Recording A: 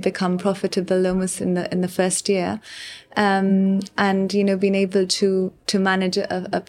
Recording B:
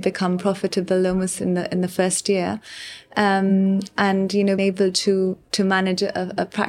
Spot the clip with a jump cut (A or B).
B